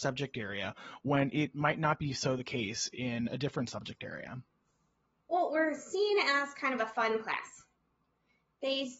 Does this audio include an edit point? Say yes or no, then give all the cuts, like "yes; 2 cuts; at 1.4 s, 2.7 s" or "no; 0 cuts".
no; 0 cuts